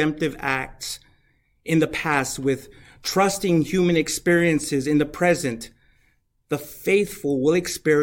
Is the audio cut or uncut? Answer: uncut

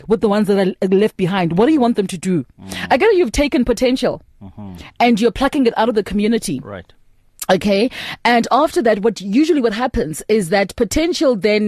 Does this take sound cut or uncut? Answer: uncut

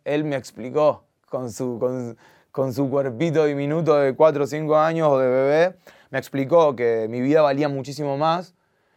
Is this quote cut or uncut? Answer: uncut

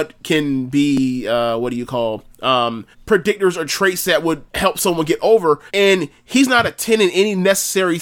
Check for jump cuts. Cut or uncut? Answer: cut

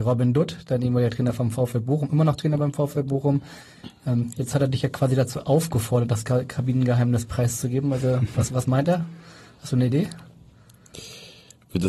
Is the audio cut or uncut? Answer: uncut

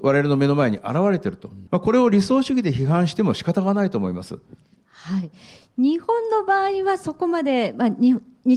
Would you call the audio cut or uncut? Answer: cut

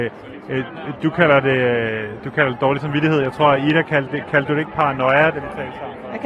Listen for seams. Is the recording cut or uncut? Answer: uncut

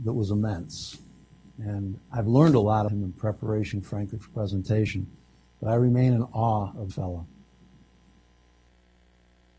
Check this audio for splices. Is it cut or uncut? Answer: cut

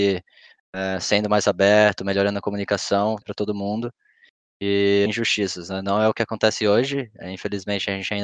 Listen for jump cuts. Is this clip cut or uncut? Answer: cut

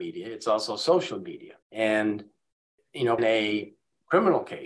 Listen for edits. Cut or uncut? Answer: cut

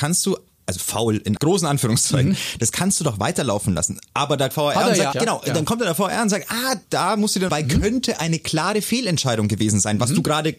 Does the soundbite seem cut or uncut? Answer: cut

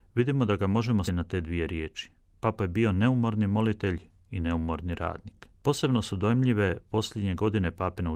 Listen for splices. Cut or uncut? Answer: cut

